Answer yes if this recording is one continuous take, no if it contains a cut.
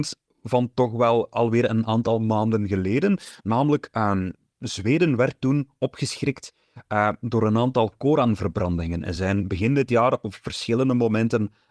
yes